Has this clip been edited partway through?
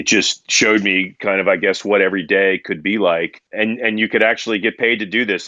no; 0 cuts

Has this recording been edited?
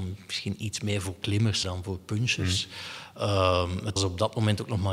yes; 2 cuts; at 1.6 s, 4.0 s

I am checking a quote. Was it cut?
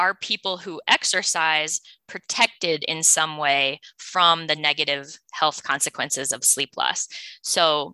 no; 0 cuts

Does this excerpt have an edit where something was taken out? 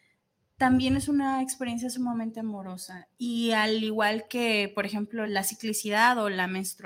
yes; 1 cut; at 5.3 s

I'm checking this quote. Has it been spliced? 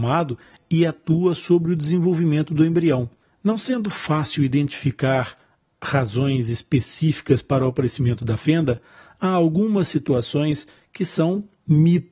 yes; 1 cut; at 3.2 s

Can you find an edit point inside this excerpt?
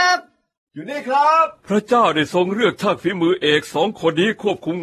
yes; 1 cut; at 1.6 s

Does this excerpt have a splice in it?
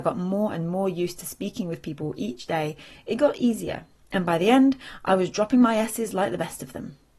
no; 0 cuts

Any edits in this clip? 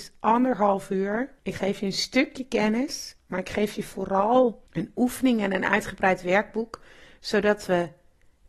yes; 2 cuts; at 1.4 s, 4.7 s

